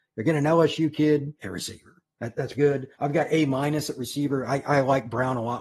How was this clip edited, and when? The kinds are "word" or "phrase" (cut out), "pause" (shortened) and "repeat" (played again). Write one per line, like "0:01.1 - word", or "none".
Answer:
0:01.4 - phrase
0:02.5 - word
0:02.9 - pause